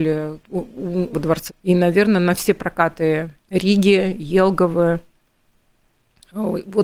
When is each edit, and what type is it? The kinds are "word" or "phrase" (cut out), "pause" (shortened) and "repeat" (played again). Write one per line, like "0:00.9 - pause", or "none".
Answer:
0:01.1 - phrase
0:01.5 - word
0:03.4 - pause